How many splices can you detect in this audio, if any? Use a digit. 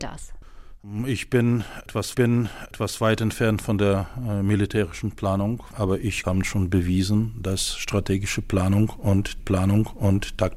3